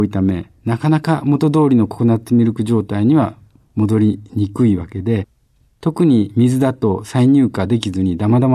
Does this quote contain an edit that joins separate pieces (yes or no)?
no